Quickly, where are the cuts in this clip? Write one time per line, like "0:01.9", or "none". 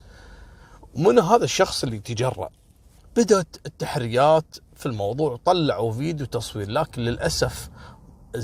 0:03.0